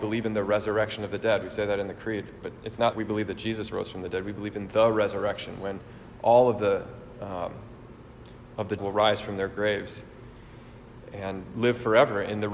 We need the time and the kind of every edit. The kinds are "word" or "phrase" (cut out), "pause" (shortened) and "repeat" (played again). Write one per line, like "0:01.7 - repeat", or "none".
0:02.9 - word
0:08.8 - word